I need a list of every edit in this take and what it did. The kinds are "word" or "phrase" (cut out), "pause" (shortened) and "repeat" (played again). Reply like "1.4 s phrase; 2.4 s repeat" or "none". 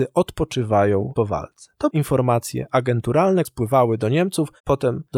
1.9 s word; 3.4 s word